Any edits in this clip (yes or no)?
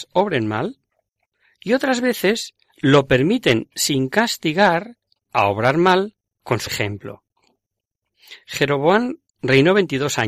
yes